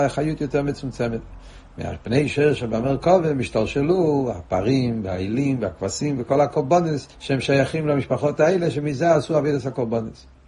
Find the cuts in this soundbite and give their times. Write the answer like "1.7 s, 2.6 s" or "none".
7.1 s